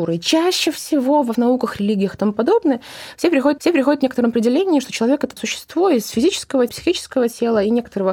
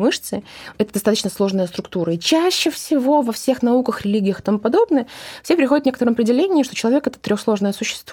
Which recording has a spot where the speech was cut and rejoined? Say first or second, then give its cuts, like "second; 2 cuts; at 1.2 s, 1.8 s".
first; 4 cuts; at 1.3 s, 3.6 s, 5.4 s, 6.7 s